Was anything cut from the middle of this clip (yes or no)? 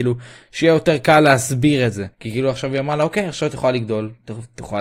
yes